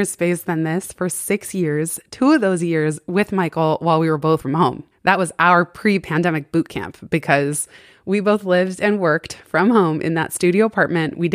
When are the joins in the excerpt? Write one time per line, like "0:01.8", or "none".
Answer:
0:04.4
0:04.9